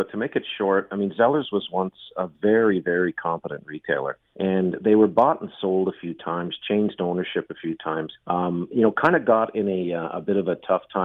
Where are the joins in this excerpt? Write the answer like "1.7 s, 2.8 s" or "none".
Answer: 4.3 s, 8.2 s